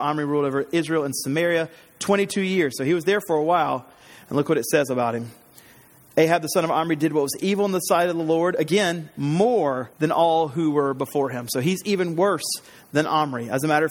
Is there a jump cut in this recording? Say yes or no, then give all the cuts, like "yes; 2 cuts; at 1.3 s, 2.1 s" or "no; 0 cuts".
yes; 1 cut; at 9.9 s